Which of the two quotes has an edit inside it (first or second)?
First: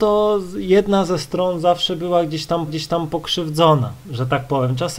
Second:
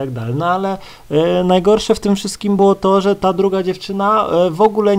first